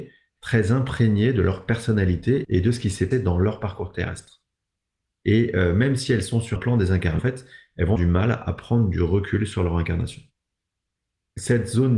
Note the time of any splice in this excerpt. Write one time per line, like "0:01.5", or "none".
0:03.1
0:06.6
0:07.2
0:08.0